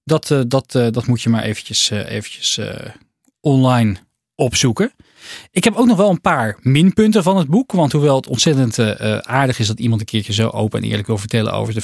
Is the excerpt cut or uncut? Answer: uncut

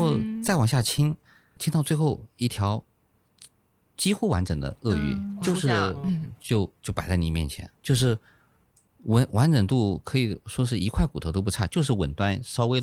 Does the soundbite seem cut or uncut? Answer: cut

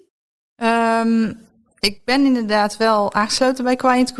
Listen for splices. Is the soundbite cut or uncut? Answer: uncut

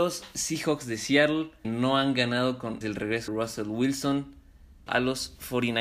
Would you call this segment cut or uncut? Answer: cut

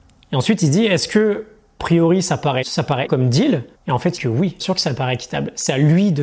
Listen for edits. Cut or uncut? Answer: cut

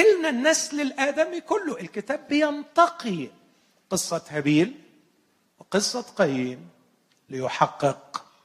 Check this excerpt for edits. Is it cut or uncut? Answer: uncut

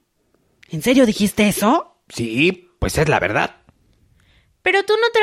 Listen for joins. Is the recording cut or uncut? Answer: uncut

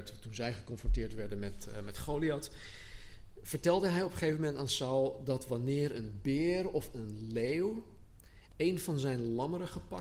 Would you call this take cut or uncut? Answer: uncut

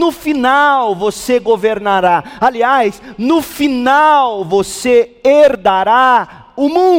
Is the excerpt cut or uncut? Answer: uncut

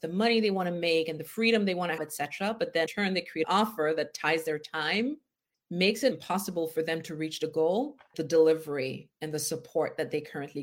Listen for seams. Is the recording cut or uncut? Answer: cut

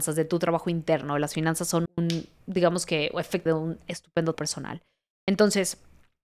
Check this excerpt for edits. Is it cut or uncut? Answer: cut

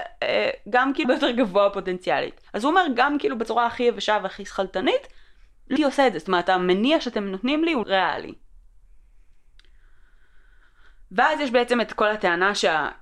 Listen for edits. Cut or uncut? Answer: cut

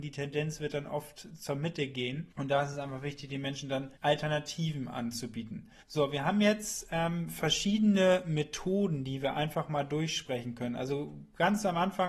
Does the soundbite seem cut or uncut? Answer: cut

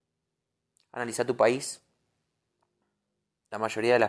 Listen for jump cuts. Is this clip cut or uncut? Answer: uncut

